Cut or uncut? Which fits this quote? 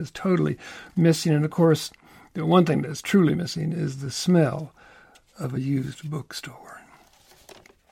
uncut